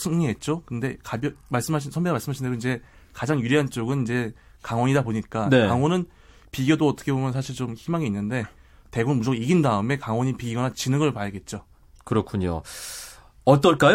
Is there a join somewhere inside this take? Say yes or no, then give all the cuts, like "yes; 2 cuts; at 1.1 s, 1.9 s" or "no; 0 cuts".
no; 0 cuts